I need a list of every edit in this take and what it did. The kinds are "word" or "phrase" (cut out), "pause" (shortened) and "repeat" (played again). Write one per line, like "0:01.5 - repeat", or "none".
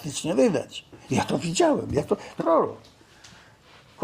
0:01.0 - pause
0:02.4 - phrase